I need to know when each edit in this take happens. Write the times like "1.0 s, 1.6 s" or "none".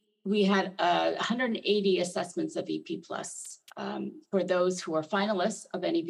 4.3 s